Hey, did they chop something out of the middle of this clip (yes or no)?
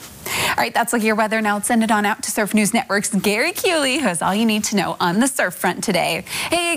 no